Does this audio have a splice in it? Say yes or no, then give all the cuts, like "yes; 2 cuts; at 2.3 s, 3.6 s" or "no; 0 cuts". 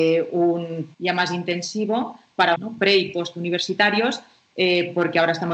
yes; 2 cuts; at 0.9 s, 2.6 s